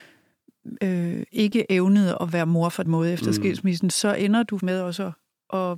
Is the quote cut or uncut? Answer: cut